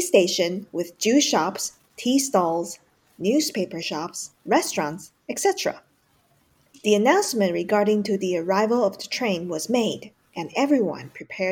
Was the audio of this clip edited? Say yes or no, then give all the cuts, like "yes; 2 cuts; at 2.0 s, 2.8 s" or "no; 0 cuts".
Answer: yes; 1 cut; at 4.3 s